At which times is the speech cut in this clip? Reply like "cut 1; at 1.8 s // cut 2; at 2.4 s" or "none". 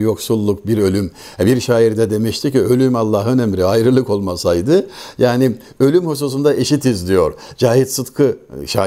none